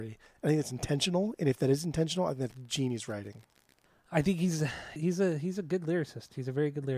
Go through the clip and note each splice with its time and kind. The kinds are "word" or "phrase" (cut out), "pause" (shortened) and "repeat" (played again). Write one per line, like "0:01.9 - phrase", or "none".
0:05.0 - word